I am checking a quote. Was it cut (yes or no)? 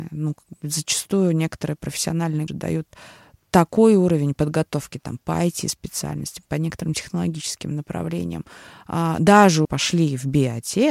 yes